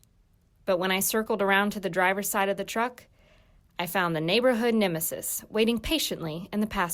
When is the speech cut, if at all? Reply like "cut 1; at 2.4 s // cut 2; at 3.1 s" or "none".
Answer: none